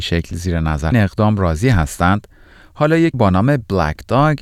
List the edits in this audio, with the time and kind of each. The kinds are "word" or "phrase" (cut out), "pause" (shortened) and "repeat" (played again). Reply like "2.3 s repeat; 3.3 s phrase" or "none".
0.9 s phrase; 3.1 s word